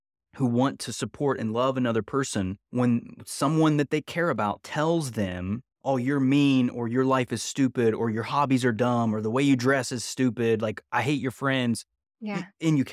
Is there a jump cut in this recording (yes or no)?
yes